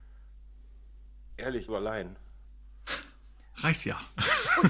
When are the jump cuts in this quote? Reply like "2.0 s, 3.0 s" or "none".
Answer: 1.7 s